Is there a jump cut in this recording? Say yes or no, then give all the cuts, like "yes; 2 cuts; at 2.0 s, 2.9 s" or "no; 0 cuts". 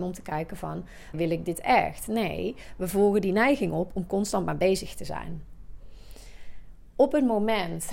yes; 1 cut; at 1.1 s